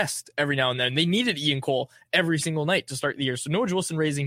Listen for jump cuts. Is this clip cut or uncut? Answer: uncut